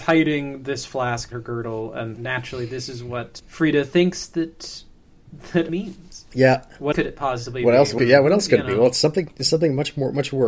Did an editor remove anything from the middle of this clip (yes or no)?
yes